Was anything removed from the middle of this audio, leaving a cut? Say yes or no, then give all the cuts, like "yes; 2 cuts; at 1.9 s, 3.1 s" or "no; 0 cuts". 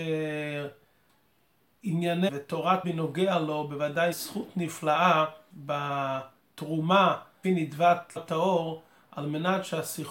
yes; 6 cuts; at 2.3 s, 2.8 s, 4.1 s, 5.5 s, 7.4 s, 8.2 s